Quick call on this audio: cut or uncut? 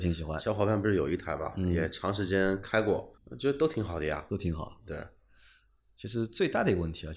cut